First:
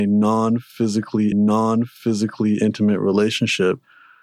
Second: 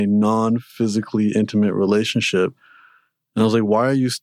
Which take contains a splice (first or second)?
first